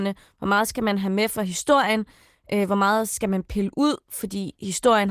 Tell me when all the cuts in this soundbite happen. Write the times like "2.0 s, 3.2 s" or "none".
none